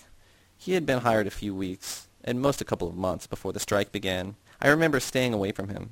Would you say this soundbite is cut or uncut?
cut